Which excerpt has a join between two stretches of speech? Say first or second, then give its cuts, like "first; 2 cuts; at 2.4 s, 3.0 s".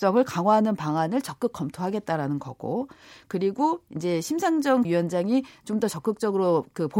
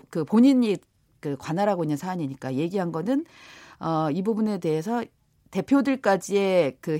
first; 1 cut; at 4.8 s